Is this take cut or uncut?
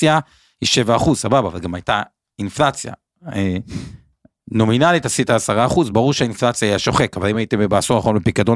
uncut